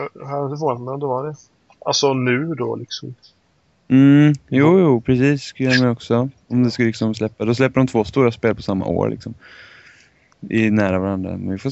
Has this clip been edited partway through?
no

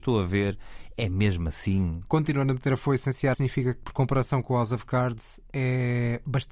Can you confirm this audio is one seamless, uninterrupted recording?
no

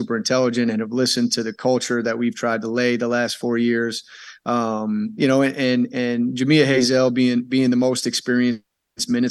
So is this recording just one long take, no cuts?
yes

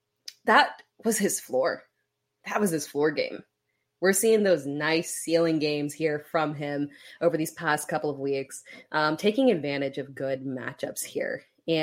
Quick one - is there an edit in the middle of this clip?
yes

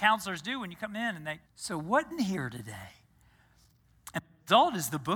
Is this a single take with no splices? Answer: no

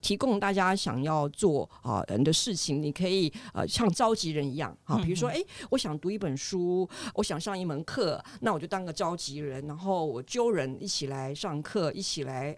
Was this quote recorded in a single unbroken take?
yes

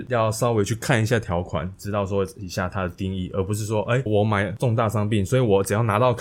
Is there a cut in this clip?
yes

